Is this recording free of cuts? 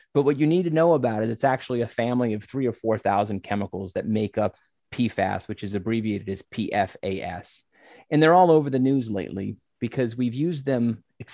yes; 0 cuts

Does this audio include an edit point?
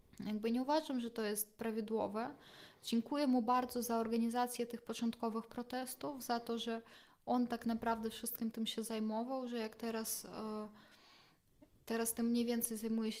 no; 0 cuts

